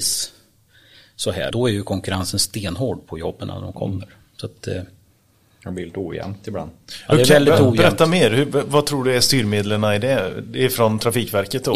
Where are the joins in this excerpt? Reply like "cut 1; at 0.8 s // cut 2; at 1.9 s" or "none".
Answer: cut 1; at 1.5 s